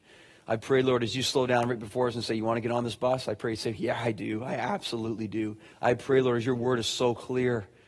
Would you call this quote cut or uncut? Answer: cut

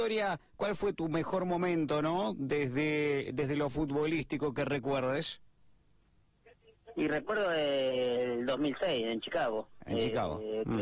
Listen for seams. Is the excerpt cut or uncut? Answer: uncut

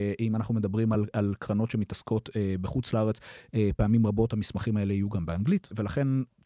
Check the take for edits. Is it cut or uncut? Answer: uncut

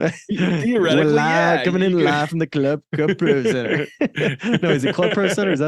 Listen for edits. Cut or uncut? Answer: uncut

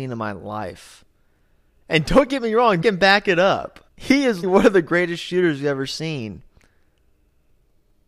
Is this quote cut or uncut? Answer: cut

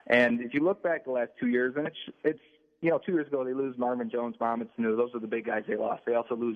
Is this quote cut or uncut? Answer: uncut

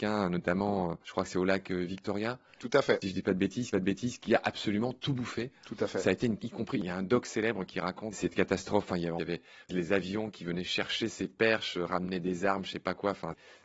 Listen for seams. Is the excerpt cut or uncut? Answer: cut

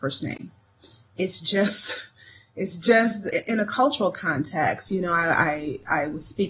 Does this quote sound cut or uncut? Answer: uncut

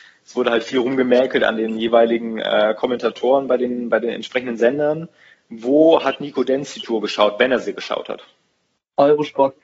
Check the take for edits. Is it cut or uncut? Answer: uncut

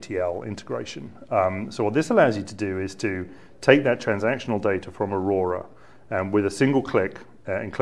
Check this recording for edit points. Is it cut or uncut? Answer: uncut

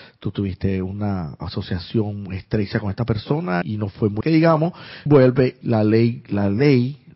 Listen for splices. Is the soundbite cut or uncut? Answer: cut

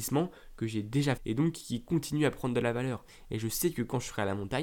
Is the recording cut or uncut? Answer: cut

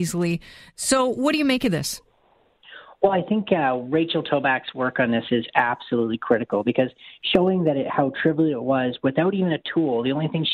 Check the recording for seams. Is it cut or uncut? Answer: uncut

